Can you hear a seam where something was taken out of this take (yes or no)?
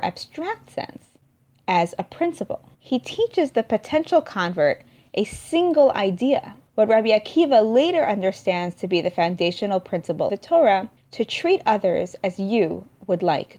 yes